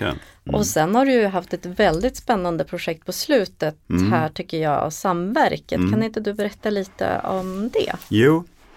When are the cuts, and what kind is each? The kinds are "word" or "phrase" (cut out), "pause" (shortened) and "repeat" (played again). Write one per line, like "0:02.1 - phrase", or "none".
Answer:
0:03.8 - pause